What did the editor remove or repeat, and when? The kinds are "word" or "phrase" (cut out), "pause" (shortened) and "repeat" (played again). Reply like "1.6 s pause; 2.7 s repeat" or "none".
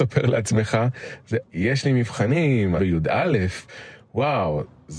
1.4 s word; 2.8 s word